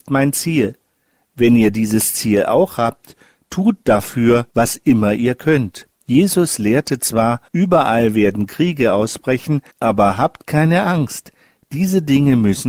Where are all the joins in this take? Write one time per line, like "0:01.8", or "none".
0:04.5
0:05.9
0:07.5
0:09.7